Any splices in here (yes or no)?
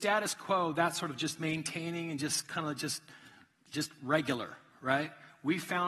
no